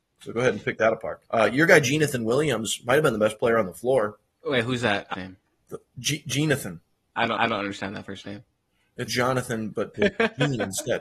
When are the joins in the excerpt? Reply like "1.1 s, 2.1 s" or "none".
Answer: 1.3 s, 5.1 s, 7.4 s, 9.1 s, 9.9 s